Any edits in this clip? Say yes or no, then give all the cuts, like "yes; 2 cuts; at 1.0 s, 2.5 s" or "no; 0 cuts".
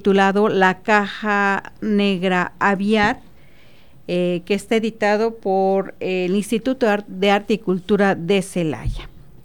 no; 0 cuts